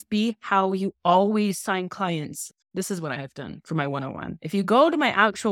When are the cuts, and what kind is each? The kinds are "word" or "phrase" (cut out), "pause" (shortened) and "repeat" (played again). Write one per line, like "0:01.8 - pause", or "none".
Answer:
0:02.6 - pause